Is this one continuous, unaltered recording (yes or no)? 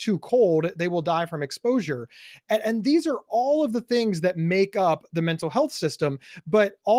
yes